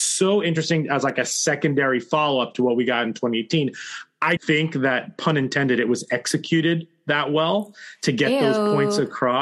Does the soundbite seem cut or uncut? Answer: cut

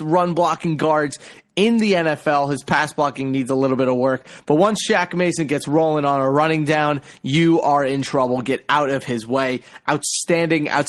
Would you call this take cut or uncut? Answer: uncut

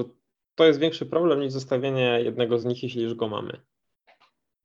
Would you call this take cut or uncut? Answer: uncut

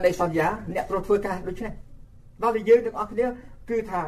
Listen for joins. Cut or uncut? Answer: uncut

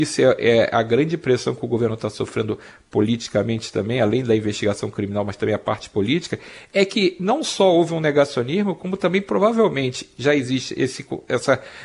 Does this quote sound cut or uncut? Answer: uncut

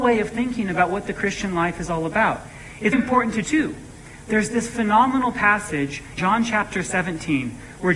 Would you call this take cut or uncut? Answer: cut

